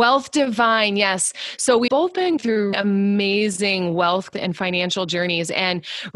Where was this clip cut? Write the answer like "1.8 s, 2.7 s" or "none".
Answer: 1.9 s, 2.4 s, 2.7 s, 4.3 s